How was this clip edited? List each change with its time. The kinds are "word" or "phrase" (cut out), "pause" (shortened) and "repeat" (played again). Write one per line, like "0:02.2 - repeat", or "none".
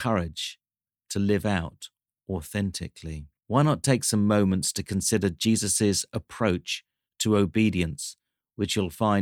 0:03.4 - pause